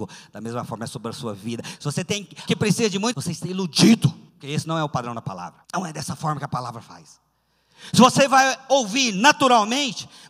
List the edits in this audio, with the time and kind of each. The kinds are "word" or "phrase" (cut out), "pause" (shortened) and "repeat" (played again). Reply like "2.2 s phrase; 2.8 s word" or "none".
2.5 s word; 3.1 s word; 4.3 s pause; 5.6 s pause